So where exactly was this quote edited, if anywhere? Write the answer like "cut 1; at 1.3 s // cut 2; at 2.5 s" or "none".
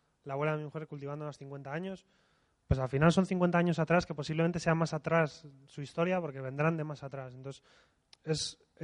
none

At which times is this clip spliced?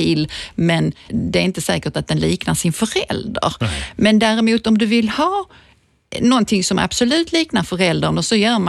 cut 1; at 1.1 s

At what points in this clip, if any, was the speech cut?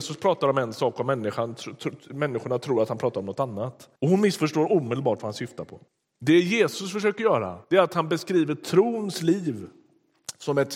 cut 1; at 4.0 s // cut 2; at 5.9 s // cut 3; at 7.6 s

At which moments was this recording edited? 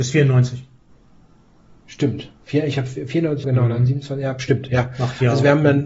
cut 1; at 0.9 s // cut 2; at 3.4 s

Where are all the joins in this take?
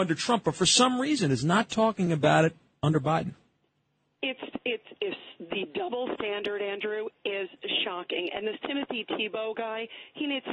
none

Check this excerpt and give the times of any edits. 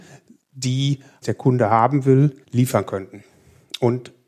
cut 1; at 1.2 s // cut 2; at 2.4 s

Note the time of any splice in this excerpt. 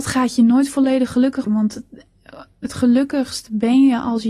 cut 1; at 1.5 s

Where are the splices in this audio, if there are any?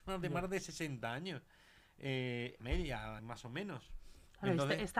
cut 1; at 2.6 s // cut 2; at 3.2 s

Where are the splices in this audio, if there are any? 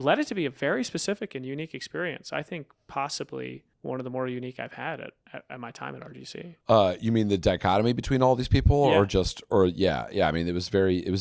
cut 1; at 3.7 s // cut 2; at 5.2 s // cut 3; at 6.6 s

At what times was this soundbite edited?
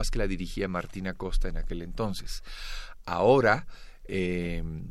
none

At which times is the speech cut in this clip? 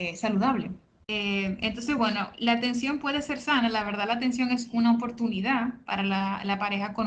none

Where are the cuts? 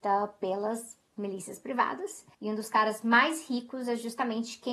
cut 1; at 2.3 s

